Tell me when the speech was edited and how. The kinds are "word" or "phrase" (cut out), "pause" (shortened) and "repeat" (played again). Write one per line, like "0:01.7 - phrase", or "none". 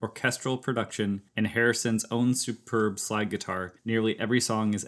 0:01.3 - pause
0:03.8 - pause